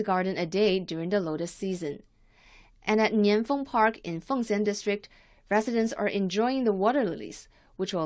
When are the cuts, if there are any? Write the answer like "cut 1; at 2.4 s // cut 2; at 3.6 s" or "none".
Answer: none

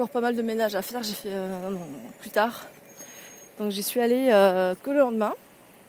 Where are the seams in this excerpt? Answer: none

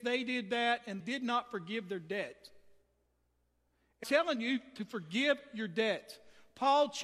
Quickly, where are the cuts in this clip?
cut 1; at 1.0 s // cut 2; at 4.0 s

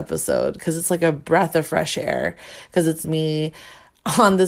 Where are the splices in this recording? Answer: cut 1; at 3.0 s

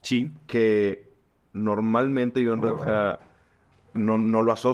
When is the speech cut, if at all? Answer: none

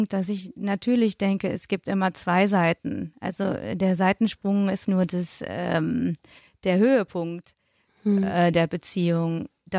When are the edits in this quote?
cut 1; at 4.8 s

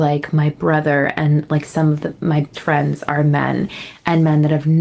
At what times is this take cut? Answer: cut 1; at 2.5 s

